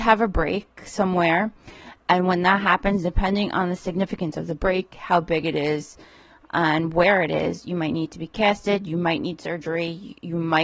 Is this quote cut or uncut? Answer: uncut